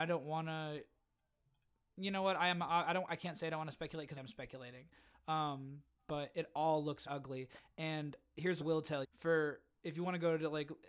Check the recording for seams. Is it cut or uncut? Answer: cut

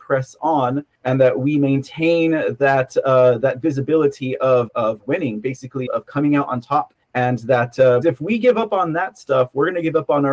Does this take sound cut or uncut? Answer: cut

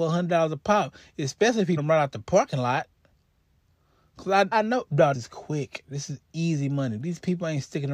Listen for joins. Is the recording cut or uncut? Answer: cut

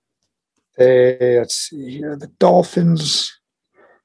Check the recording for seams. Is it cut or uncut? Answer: uncut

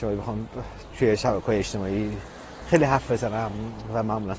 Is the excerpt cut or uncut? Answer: uncut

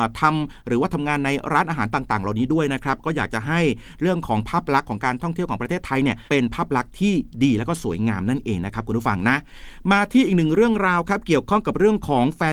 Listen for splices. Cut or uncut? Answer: cut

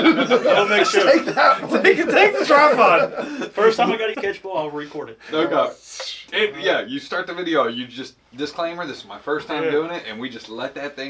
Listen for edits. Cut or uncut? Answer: cut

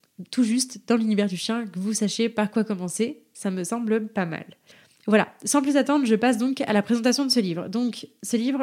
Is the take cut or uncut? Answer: uncut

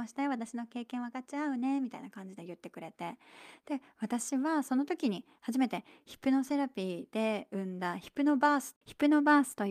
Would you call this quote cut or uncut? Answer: cut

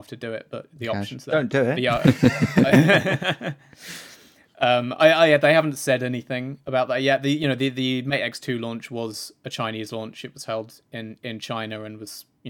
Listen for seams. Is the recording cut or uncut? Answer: uncut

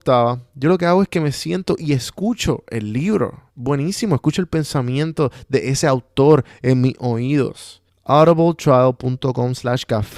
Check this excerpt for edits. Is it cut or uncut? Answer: cut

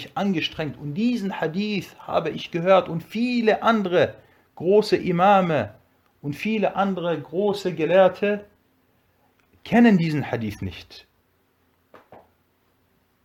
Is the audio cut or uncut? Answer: uncut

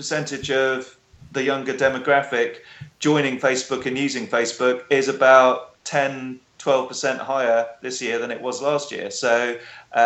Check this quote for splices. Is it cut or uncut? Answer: cut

